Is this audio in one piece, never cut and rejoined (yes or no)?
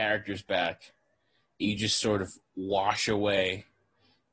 yes